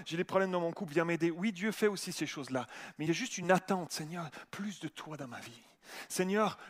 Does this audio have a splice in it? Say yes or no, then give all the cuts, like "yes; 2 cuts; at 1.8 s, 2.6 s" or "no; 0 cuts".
no; 0 cuts